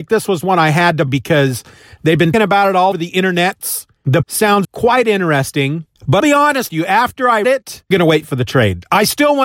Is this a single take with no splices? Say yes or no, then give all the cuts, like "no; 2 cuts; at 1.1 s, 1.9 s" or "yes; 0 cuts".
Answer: no; 9 cuts; at 1.1 s, 2.3 s, 2.9 s, 4.2 s, 4.6 s, 6.2 s, 6.7 s, 7.4 s, 7.9 s